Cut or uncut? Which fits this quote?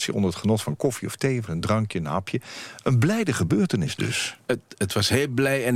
uncut